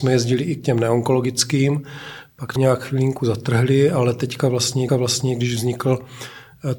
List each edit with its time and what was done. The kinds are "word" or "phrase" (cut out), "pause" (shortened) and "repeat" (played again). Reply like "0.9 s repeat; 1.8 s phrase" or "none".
2.6 s word; 4.9 s repeat